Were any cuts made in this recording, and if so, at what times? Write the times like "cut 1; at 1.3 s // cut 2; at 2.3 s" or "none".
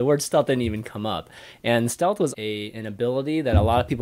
cut 1; at 2.3 s